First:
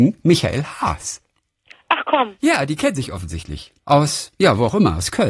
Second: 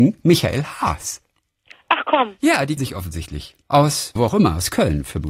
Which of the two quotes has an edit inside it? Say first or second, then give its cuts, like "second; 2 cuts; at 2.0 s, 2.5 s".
second; 2 cuts; at 2.8 s, 4.2 s